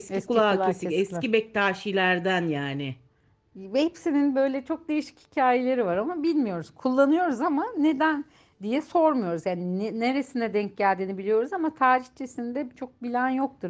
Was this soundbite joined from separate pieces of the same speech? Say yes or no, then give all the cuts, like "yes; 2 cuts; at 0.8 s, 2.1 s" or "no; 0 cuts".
no; 0 cuts